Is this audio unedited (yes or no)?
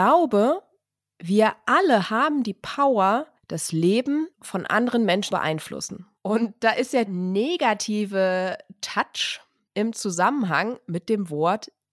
no